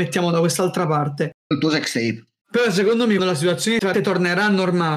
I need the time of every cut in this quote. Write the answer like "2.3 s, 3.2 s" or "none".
1.5 s, 3.2 s, 3.9 s